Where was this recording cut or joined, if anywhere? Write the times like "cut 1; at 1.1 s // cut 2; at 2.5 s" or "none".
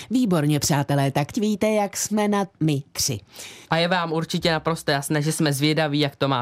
cut 1; at 1.3 s // cut 2; at 2.6 s // cut 3; at 3.7 s